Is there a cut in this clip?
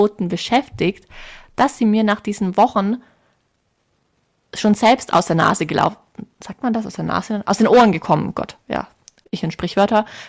no; 0 cuts

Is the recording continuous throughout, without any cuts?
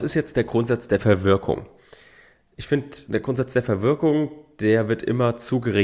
yes; 0 cuts

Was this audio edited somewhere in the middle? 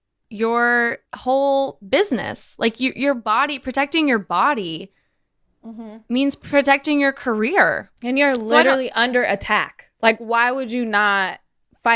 yes; 3 cuts; at 1.1 s, 8.0 s, 9.9 s

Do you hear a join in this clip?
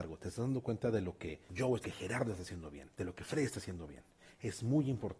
yes; 3 cuts; at 1.5 s, 1.8 s, 2.9 s

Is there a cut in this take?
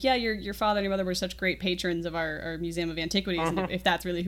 no; 0 cuts

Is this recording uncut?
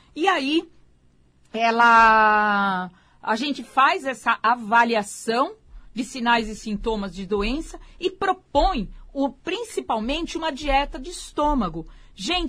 yes; 0 cuts

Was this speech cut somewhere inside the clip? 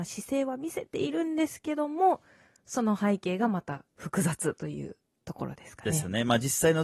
no; 0 cuts

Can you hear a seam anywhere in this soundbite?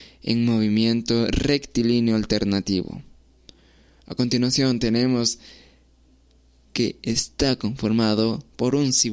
no; 0 cuts

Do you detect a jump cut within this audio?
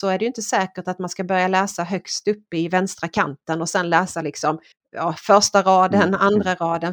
yes; 1 cut; at 4.7 s

